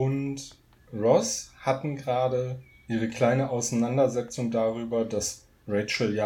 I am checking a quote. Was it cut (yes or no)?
no